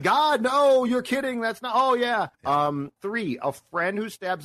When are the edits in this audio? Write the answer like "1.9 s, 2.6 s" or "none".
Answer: 2.3 s, 3.0 s

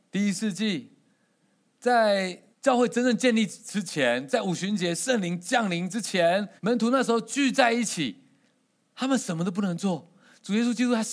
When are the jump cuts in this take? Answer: 2.5 s, 6.6 s

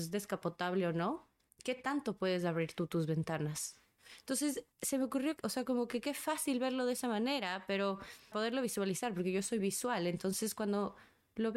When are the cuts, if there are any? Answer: 1.5 s, 4.7 s, 5.4 s, 8.3 s, 9.6 s

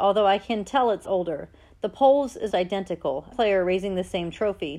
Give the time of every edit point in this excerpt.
1.0 s, 2.5 s, 3.3 s

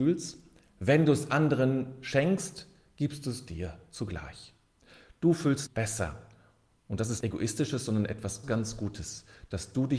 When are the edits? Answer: 5.7 s, 7.2 s, 8.4 s

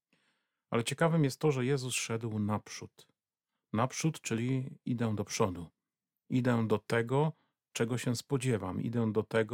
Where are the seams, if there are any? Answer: none

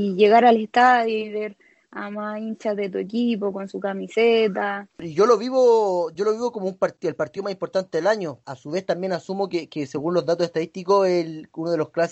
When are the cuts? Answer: none

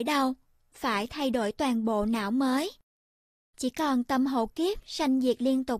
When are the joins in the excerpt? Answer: none

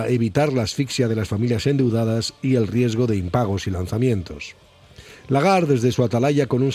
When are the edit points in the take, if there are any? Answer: none

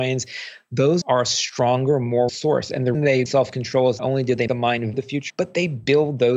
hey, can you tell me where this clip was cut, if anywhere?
1.0 s, 2.3 s, 2.9 s, 3.3 s, 4.0 s, 4.5 s, 4.9 s, 5.3 s

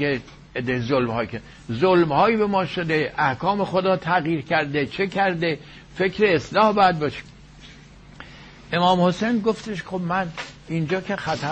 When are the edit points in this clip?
none

